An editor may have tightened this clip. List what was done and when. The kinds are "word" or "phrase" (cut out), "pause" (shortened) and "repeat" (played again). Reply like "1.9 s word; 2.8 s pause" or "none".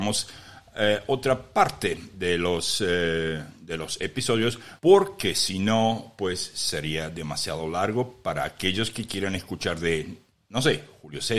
4.8 s pause

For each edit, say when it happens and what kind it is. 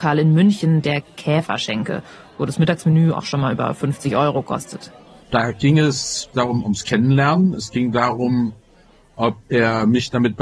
6.3 s word

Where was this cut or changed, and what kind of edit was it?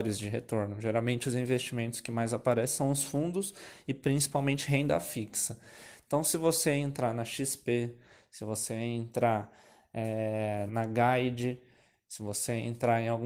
10.7 s word

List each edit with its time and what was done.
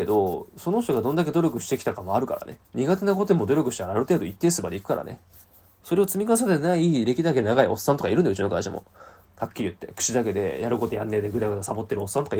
2.6 s pause

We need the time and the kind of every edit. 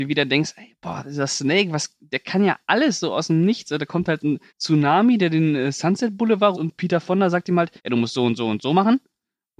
4.5 s pause; 6.5 s word; 7.8 s pause

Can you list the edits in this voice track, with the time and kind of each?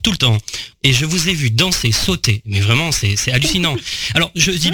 none

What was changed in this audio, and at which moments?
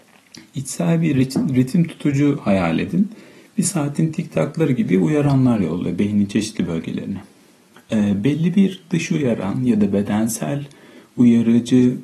none

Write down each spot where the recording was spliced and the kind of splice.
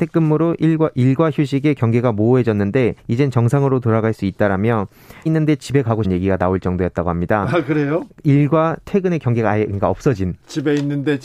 3.0 s pause; 5.3 s word; 6.0 s word

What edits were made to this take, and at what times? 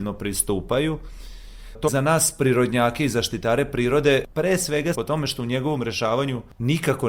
1.9 s phrase; 4.9 s word

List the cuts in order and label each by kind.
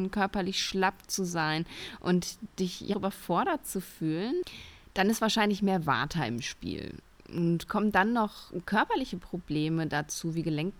2.9 s word

